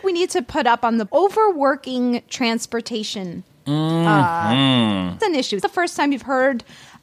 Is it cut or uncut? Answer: cut